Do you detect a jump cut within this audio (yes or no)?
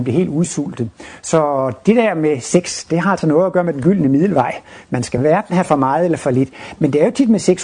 no